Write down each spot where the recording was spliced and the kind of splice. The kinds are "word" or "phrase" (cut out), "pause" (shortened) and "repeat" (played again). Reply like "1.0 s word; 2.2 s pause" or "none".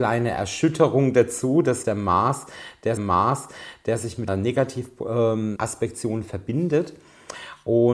1.8 s word; 3.0 s repeat; 4.3 s phrase; 5.6 s word